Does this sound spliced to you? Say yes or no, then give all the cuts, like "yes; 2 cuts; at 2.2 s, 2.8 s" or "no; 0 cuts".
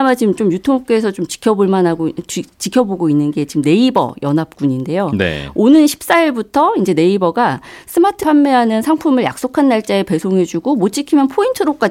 yes; 1 cut; at 8.2 s